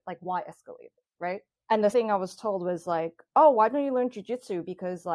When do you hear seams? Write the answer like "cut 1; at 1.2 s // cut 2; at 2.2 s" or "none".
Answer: cut 1; at 1.6 s // cut 2; at 1.9 s